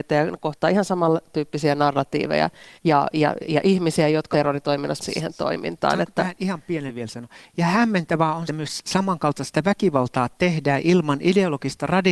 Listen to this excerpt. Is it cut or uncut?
cut